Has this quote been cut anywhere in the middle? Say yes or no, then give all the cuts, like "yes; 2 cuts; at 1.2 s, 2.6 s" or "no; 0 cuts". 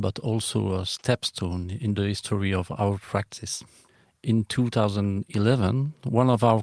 no; 0 cuts